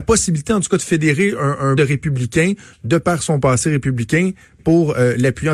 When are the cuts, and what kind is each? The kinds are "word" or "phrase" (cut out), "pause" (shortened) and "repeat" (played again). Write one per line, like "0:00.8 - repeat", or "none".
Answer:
0:01.8 - phrase